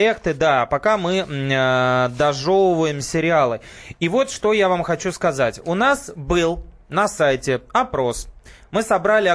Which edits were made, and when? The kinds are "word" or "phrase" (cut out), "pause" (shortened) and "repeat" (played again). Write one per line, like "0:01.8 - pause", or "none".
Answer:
none